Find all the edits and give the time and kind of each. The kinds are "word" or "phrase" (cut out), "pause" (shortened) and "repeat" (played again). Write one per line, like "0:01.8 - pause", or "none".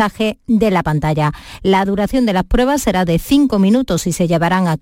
none